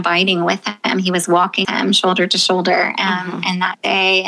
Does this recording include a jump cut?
yes; 1 cut; at 1.6 s

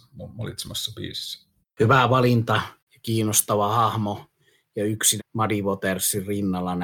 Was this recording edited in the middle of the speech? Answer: yes; 3 cuts; at 1.6 s, 2.8 s, 5.2 s

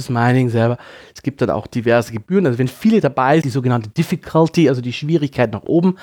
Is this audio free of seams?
no; 1 cut; at 3.4 s

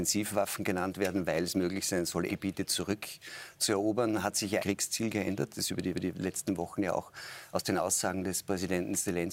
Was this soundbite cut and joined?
yes; 3 cuts; at 2.3 s, 4.6 s, 5.9 s

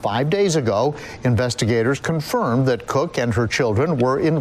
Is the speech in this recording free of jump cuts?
yes; 0 cuts

